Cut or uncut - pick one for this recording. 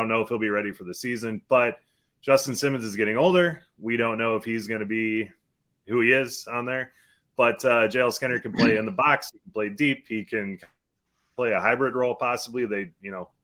uncut